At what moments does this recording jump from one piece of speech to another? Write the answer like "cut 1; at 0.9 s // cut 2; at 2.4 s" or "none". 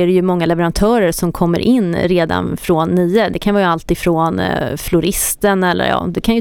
none